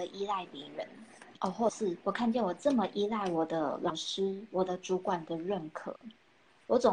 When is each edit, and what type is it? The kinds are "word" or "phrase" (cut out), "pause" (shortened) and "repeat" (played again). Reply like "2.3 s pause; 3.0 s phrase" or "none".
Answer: 2.0 s pause

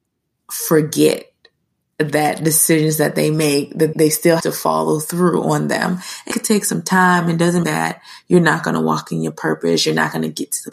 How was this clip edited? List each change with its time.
3.9 s word; 4.4 s word; 6.3 s word; 7.6 s word

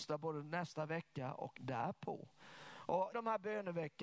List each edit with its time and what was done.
1.6 s word; 3.1 s word

